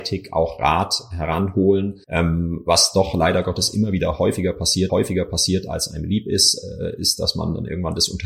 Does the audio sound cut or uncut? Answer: cut